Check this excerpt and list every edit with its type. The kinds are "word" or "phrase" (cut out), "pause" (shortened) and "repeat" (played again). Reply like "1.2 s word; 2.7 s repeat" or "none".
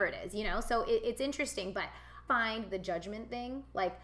2.3 s word; 2.7 s phrase